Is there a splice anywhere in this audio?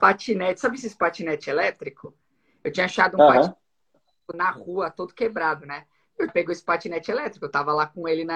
yes; 2 cuts; at 4.3 s, 6.3 s

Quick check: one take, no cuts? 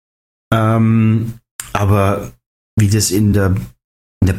yes; 0 cuts

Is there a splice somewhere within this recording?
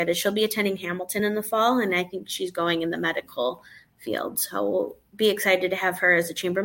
no; 0 cuts

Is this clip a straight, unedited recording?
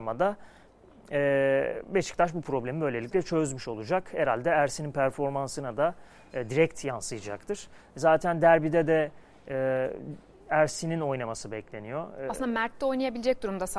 yes; 0 cuts

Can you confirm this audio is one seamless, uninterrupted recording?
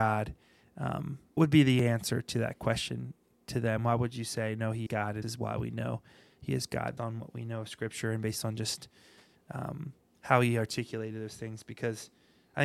no; 4 cuts; at 1.4 s, 4.9 s, 5.2 s, 7.0 s

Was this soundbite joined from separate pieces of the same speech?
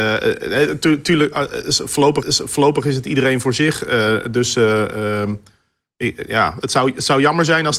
yes; 1 cut; at 2.2 s

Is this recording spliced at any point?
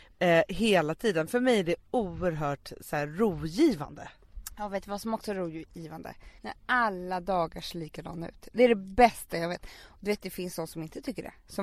yes; 1 cut; at 6.4 s

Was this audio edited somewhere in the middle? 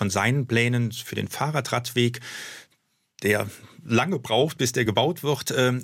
no; 0 cuts

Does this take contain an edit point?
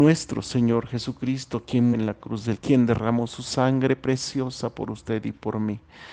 yes; 2 cuts; at 1.9 s, 2.6 s

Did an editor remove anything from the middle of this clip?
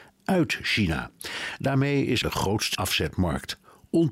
yes; 2 cuts; at 2.2 s, 2.7 s

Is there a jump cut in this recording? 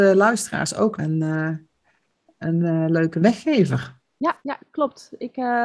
yes; 2 cuts; at 1.0 s, 4.4 s

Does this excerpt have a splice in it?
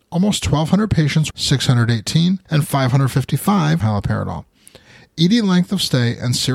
yes; 3 cuts; at 1.3 s, 2.5 s, 3.8 s

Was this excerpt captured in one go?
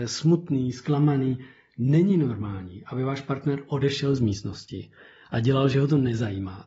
yes; 0 cuts

